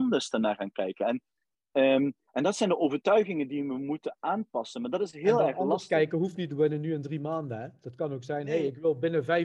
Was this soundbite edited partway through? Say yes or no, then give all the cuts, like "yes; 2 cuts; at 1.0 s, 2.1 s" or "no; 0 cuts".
no; 0 cuts